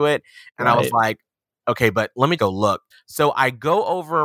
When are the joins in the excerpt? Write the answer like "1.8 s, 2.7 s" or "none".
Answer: 2.4 s, 2.9 s